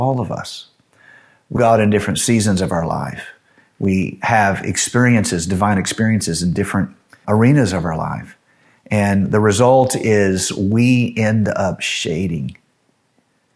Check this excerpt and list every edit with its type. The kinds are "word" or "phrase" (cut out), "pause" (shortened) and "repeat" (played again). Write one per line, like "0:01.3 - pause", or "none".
0:01.6 - word
0:07.2 - word